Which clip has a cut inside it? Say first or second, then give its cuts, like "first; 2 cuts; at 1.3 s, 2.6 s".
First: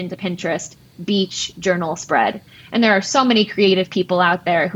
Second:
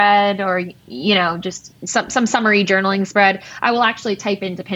second; 1 cut; at 1.8 s